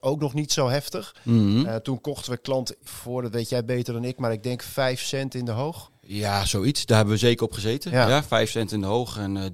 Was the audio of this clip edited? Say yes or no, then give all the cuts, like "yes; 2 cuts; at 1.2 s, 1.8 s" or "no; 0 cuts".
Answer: yes; 1 cut; at 2.9 s